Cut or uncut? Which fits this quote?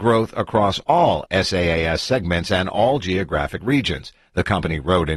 uncut